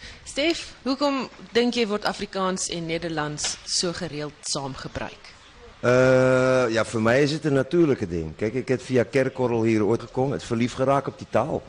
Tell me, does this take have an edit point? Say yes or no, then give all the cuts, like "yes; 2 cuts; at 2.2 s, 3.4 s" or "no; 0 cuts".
yes; 2 cuts; at 5.7 s, 10.0 s